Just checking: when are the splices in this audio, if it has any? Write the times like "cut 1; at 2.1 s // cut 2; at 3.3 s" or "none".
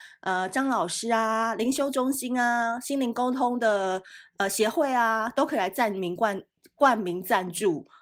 none